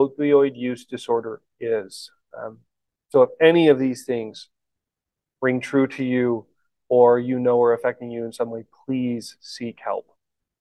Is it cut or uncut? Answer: uncut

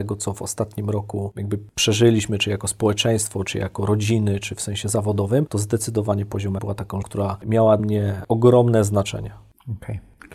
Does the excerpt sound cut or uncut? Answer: cut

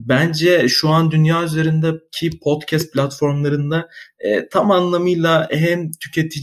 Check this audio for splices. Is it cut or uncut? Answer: uncut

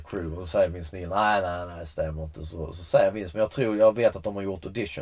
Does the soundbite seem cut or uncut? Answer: uncut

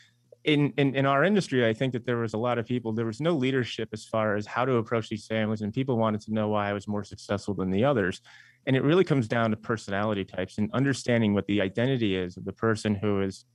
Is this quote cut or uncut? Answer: uncut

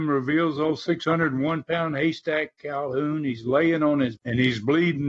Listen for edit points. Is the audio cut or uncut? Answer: cut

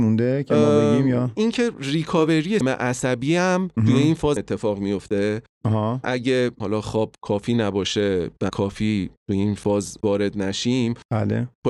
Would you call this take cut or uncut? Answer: cut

